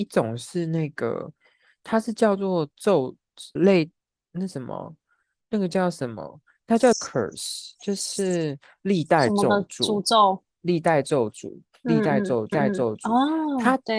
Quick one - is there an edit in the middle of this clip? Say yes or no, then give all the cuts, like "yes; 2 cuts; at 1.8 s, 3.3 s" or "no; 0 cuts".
yes; 3 cuts; at 3.6 s, 6.9 s, 12.5 s